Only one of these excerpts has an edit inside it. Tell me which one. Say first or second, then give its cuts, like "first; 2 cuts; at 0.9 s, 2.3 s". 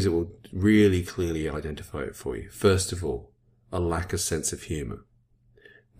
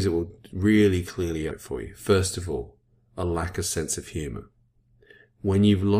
second; 1 cut; at 1.5 s